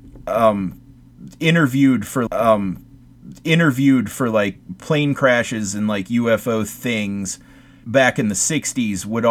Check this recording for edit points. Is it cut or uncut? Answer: cut